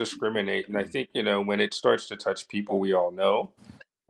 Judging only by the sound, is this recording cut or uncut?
uncut